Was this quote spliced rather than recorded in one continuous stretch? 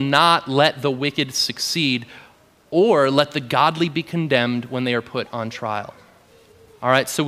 no; 0 cuts

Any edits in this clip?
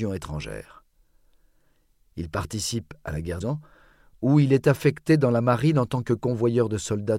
yes; 1 cut; at 3.4 s

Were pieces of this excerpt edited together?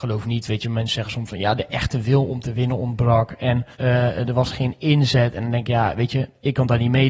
yes; 1 cut; at 3.7 s

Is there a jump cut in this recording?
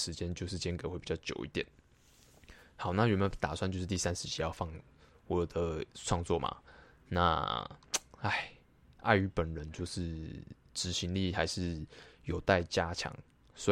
no; 0 cuts

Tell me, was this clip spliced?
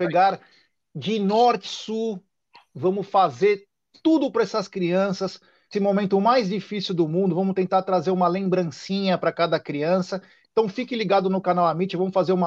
yes; 2 cuts; at 1.6 s, 5.7 s

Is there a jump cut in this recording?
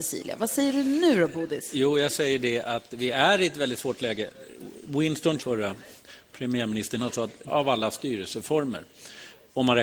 yes; 3 cuts; at 5.4 s, 7.0 s, 7.5 s

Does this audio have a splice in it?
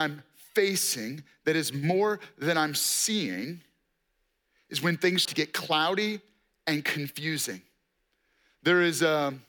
yes; 1 cut; at 5.2 s

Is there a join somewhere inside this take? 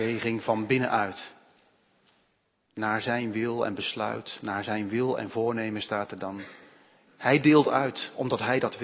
no; 0 cuts

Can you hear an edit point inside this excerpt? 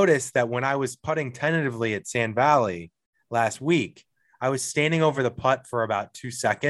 no; 0 cuts

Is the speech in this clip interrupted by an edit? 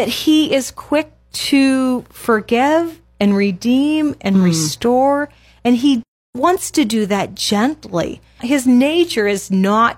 no; 0 cuts

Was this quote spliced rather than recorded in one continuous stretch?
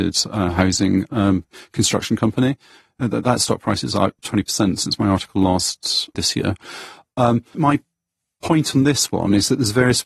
yes; 3 cuts; at 4.2 s, 6.1 s, 7.5 s

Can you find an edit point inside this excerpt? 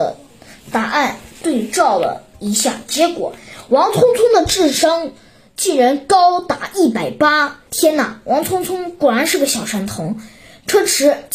yes; 1 cut; at 7.7 s

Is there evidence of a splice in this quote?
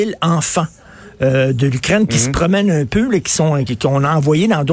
yes; 1 cut; at 3.7 s

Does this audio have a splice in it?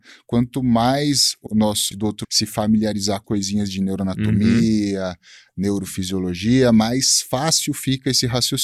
yes; 4 cuts; at 1.5 s, 1.9 s, 2.2 s, 3.2 s

